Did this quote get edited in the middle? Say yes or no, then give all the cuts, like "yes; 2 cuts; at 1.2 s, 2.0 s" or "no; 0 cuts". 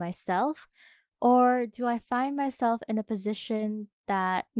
no; 0 cuts